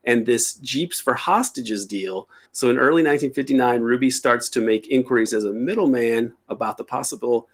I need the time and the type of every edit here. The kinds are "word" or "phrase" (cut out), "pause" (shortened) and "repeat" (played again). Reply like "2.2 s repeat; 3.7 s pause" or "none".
2.5 s pause